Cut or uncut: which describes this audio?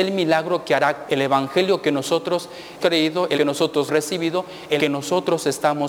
cut